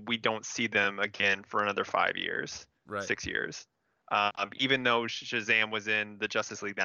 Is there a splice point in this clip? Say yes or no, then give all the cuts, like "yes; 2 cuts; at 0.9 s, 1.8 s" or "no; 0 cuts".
no; 0 cuts